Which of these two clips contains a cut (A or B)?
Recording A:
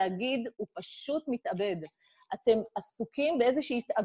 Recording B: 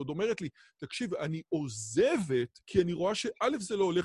B